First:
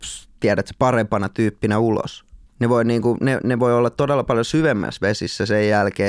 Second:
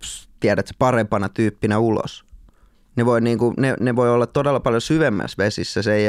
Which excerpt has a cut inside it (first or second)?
first